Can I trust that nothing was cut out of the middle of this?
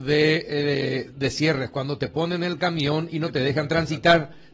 yes; 0 cuts

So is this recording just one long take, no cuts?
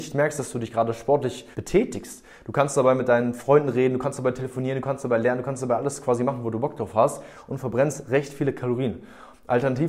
no; 1 cut; at 1.5 s

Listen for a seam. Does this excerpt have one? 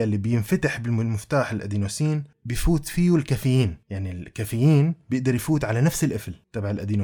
no; 0 cuts

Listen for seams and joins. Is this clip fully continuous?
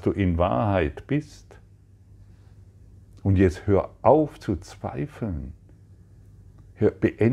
yes; 0 cuts

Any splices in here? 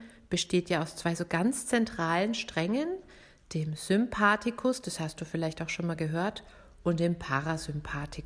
no; 0 cuts

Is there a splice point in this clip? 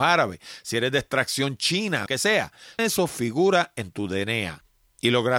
yes; 2 cuts; at 2.1 s, 2.8 s

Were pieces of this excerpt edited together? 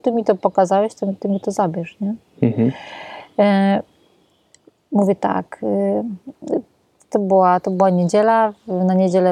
no; 0 cuts

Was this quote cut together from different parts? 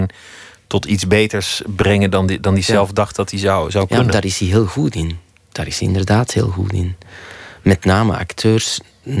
no; 0 cuts

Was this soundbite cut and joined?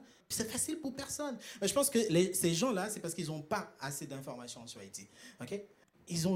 no; 0 cuts

